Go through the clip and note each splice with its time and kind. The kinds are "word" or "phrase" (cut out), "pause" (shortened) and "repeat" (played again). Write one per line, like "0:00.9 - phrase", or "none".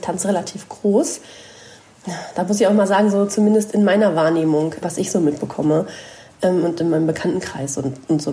0:04.8 - word